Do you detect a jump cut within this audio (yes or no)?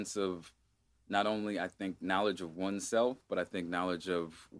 no